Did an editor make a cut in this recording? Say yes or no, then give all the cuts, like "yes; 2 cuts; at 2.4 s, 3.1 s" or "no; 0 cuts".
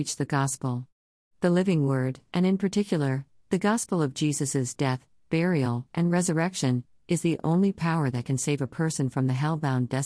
no; 0 cuts